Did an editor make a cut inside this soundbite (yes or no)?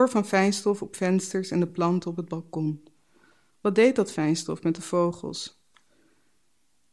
no